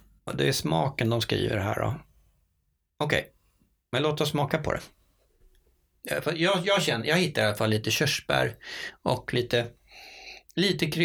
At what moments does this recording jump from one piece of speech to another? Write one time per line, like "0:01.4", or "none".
none